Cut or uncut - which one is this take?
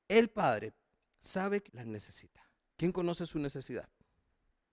cut